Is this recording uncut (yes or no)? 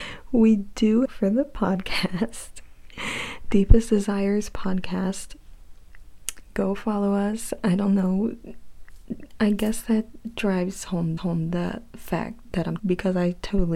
no